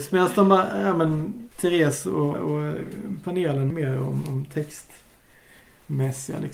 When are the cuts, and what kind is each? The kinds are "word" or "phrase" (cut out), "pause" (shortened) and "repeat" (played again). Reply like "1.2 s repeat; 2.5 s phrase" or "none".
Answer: 1.5 s pause; 2.3 s word; 3.7 s phrase